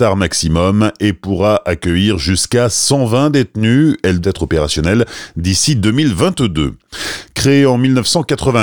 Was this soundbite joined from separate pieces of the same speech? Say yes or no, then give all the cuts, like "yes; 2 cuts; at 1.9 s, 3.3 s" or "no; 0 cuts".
yes; 1 cut; at 4.2 s